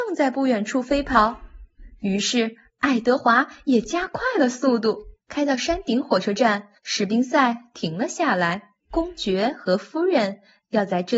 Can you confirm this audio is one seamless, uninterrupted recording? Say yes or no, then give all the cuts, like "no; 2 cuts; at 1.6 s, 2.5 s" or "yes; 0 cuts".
no; 3 cuts; at 5.2 s, 6.8 s, 8.8 s